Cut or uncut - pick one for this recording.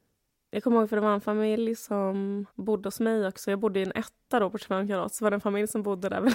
cut